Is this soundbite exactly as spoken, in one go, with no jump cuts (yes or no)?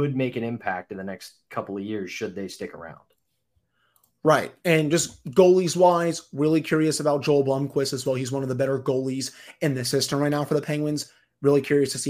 yes